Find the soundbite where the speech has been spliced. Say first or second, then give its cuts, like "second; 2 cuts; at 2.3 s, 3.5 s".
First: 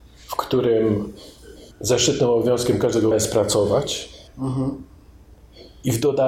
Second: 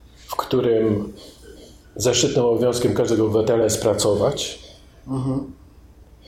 first; 3 cuts; at 1.7 s, 3.1 s, 4.3 s